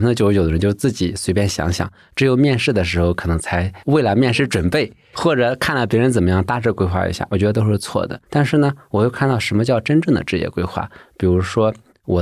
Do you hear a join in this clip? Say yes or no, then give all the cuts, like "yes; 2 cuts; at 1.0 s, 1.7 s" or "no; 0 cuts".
yes; 2 cuts; at 3.8 s, 8.2 s